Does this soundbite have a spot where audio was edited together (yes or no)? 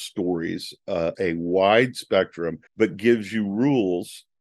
yes